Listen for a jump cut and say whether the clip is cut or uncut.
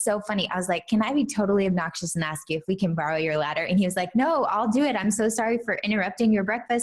uncut